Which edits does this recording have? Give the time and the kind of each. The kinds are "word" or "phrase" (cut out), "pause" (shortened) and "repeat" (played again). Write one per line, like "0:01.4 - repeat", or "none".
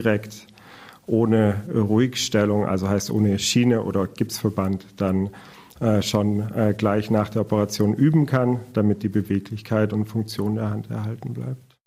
none

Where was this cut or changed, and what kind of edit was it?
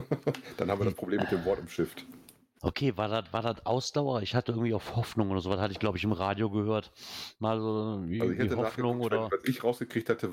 none

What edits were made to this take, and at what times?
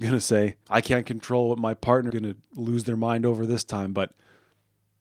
0:02.1 - word

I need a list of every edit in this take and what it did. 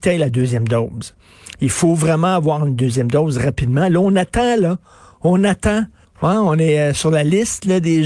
0:06.0 - pause

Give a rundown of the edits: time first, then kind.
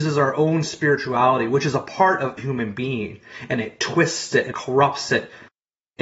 0:02.4 - word
0:04.5 - word

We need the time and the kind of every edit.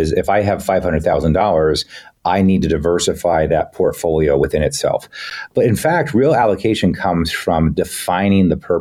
none

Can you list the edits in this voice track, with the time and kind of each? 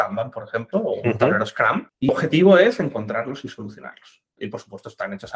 0:02.1 - word
0:04.3 - pause

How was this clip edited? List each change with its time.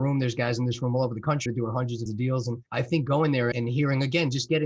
0:01.5 - word
0:02.1 - phrase
0:02.7 - pause
0:03.5 - word

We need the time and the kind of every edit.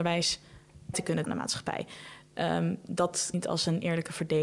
0:00.9 - word
0:01.2 - word
0:03.3 - word

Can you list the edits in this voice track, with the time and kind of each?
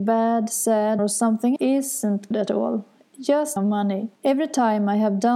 0:01.0 - word
0:01.6 - word
0:02.3 - word
0:03.6 - word
0:04.2 - pause

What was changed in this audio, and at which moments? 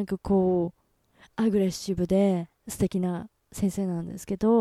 0:02.6 - pause

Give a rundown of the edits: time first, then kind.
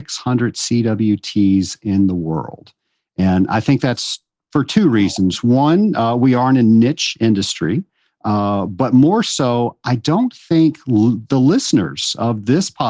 none

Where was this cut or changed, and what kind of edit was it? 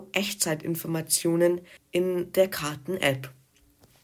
0:01.8 - pause

